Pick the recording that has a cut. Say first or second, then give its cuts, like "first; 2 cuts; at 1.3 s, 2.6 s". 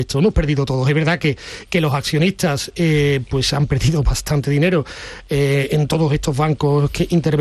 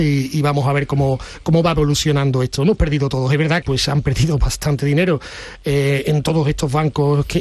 second; 1 cut; at 3.6 s